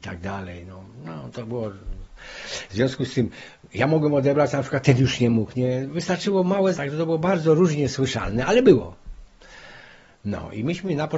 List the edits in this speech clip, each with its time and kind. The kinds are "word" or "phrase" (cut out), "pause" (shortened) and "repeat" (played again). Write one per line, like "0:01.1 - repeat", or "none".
0:06.7 - word